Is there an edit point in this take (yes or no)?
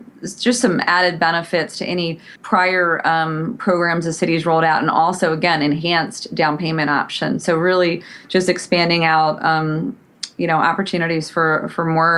yes